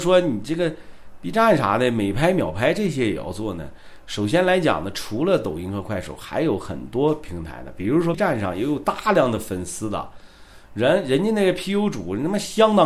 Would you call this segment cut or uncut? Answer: cut